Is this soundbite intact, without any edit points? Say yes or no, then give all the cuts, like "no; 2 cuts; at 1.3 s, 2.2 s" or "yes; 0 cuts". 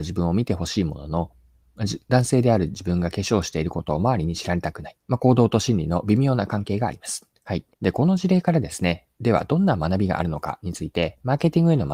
no; 4 cuts; at 5.0 s, 7.4 s, 7.7 s, 9.1 s